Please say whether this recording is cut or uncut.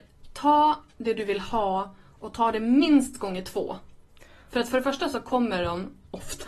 uncut